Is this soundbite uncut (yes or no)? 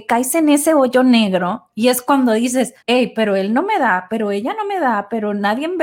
no